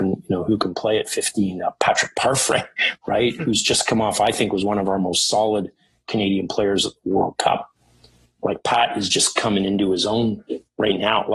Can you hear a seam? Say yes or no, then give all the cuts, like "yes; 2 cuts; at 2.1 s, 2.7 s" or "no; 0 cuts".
no; 0 cuts